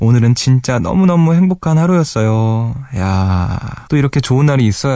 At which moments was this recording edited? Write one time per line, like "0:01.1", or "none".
0:03.9